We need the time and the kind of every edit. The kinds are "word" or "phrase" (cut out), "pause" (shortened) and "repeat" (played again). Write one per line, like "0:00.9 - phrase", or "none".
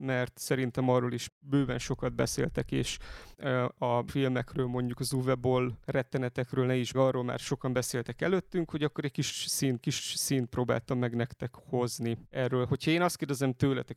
0:01.3 - word
0:03.3 - word
0:04.1 - word
0:05.8 - pause
0:06.9 - phrase
0:09.8 - repeat
0:12.3 - pause